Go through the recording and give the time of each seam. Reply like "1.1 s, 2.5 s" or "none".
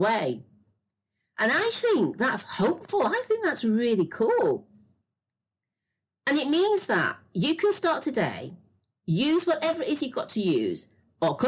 none

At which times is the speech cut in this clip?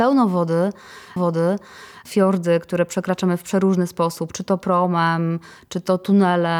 1.2 s

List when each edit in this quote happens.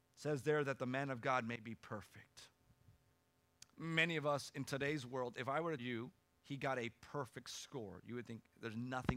3.7 s, 5.8 s, 6.4 s

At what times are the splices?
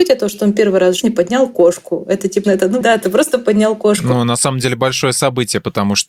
1.0 s, 2.4 s, 2.8 s

